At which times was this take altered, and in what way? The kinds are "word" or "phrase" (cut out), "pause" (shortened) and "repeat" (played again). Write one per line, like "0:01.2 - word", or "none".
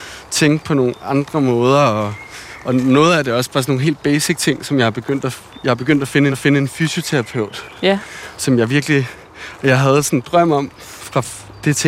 0:06.3 - repeat